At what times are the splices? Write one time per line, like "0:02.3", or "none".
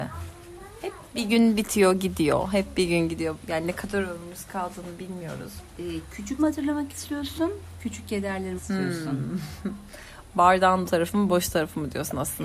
0:06.4
0:08.6
0:10.9